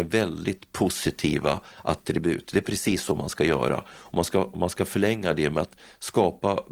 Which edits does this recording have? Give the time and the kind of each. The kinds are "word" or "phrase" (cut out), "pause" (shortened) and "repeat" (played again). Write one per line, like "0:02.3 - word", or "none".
none